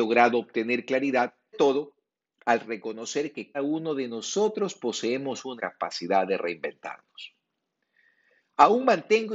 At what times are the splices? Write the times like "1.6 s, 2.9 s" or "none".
1.5 s, 3.5 s, 5.6 s